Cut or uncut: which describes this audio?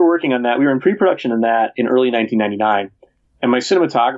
uncut